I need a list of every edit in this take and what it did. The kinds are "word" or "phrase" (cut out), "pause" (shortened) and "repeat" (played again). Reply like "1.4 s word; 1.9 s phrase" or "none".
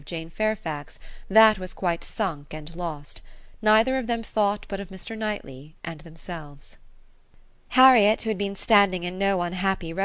none